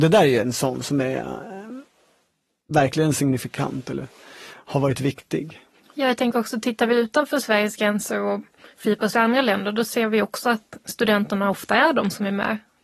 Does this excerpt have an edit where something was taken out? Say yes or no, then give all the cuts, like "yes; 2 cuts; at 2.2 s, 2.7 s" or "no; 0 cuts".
no; 0 cuts